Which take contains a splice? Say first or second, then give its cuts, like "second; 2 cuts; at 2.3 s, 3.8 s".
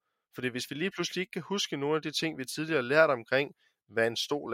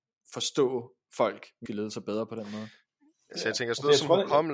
second; 1 cut; at 1.7 s